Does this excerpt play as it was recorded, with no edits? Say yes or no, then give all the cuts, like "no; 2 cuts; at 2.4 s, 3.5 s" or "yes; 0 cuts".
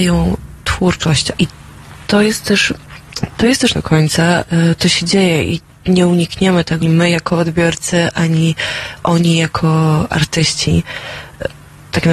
no; 3 cuts; at 1.3 s, 3.7 s, 6.8 s